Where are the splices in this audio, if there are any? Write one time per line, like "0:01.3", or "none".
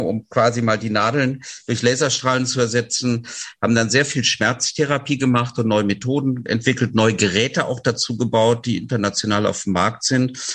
0:06.5